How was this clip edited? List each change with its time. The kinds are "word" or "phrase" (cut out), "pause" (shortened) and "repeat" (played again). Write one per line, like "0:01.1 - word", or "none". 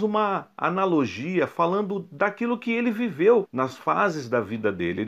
0:03.4 - word